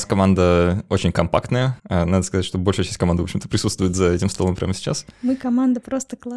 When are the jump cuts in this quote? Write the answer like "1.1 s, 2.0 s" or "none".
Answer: 1.8 s

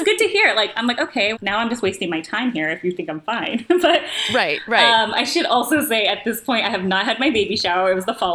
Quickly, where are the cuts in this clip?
1.3 s

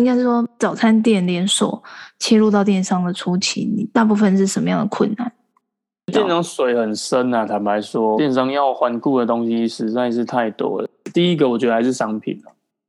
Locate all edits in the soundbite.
8.2 s

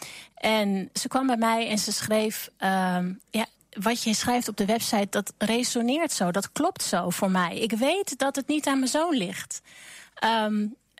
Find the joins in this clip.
none

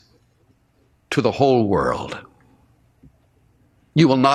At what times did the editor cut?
none

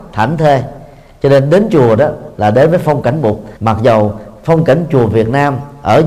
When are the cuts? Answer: 3.6 s

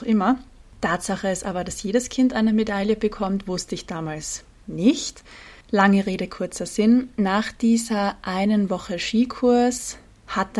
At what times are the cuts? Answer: 5.6 s

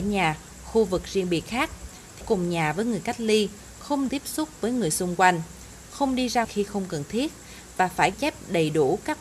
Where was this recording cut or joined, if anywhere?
2.2 s, 4.1 s, 6.4 s, 8.1 s

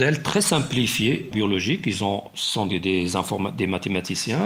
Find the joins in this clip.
1.3 s, 2.7 s

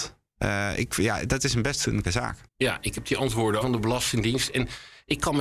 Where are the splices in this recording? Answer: 2.0 s, 2.5 s, 3.6 s

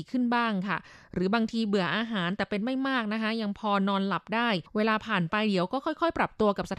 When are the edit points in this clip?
4.7 s

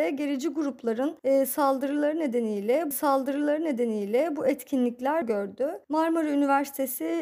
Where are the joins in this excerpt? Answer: 1.2 s, 2.9 s, 5.2 s, 5.8 s

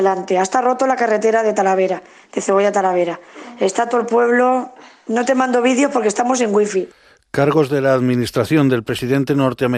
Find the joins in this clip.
none

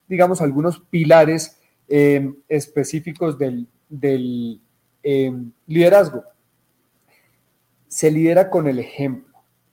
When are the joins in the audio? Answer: none

